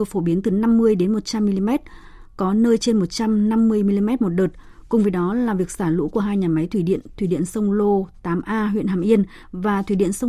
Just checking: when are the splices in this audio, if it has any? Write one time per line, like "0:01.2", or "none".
none